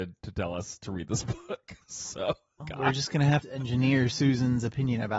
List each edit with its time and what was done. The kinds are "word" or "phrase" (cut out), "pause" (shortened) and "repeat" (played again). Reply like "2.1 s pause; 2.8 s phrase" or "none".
2.6 s phrase; 3.4 s phrase